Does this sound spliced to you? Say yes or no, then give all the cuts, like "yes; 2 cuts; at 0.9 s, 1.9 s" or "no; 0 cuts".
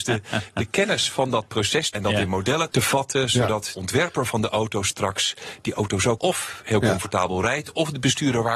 yes; 4 cuts; at 1.9 s, 2.7 s, 3.7 s, 6.2 s